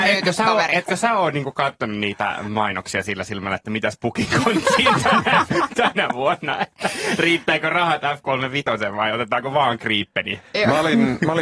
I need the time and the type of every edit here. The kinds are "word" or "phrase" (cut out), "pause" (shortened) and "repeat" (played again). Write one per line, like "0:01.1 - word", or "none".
none